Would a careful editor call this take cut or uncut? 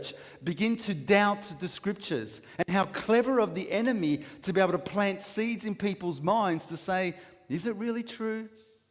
uncut